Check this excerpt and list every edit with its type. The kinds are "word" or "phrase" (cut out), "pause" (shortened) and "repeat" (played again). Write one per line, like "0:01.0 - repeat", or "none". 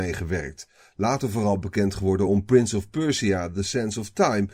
none